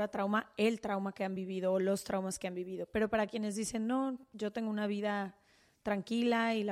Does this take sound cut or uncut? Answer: uncut